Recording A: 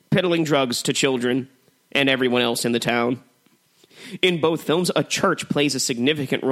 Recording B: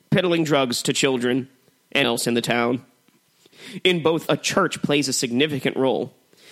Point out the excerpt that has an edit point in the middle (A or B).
B